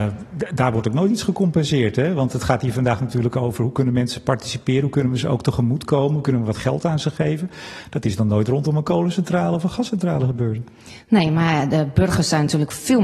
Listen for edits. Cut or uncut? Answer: uncut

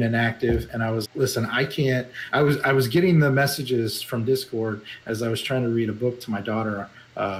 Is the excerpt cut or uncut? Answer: cut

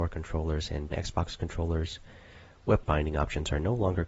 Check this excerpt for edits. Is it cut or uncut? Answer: cut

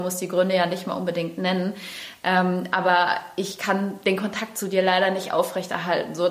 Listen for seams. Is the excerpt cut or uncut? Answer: uncut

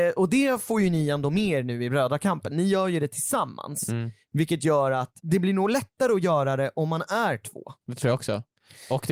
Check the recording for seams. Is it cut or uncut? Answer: cut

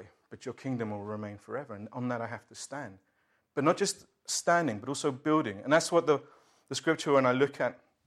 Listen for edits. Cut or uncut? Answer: uncut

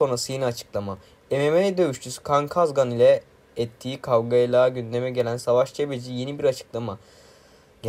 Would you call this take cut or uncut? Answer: uncut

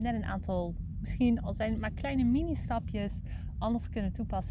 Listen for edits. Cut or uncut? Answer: uncut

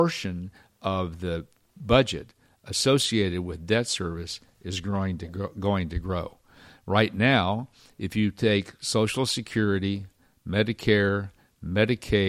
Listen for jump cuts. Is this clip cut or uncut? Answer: uncut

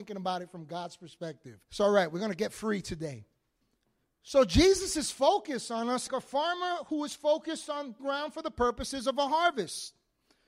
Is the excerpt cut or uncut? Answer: cut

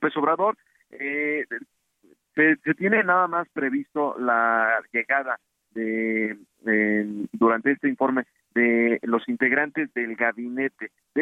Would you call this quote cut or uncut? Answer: uncut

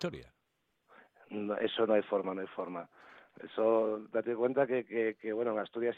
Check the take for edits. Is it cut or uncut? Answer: uncut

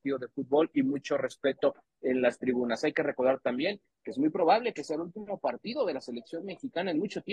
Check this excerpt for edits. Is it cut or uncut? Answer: uncut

